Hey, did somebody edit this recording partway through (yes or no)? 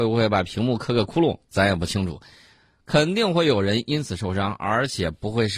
no